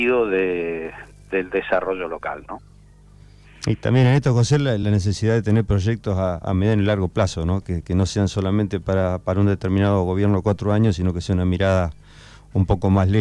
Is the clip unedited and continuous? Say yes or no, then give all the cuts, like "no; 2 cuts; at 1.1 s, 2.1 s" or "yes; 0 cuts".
yes; 0 cuts